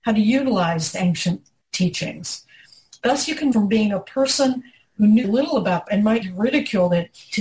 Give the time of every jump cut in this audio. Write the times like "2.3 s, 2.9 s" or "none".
0.9 s, 3.5 s, 5.2 s, 5.9 s, 6.2 s